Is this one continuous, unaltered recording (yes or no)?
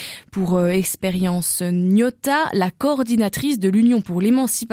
yes